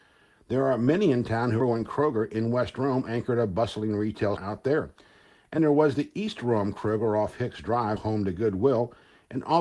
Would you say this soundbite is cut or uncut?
cut